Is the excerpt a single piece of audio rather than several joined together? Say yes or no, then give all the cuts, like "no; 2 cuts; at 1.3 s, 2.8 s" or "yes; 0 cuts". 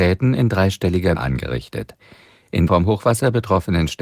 no; 2 cuts; at 1.1 s, 2.7 s